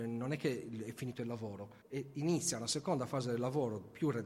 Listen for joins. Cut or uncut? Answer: cut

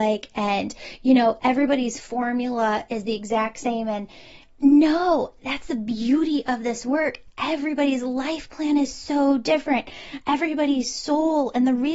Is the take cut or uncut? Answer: cut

